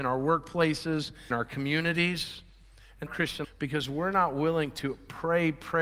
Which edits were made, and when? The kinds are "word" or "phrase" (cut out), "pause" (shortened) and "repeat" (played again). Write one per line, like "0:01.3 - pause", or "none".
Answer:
0:01.3 - word
0:03.1 - phrase
0:03.4 - phrase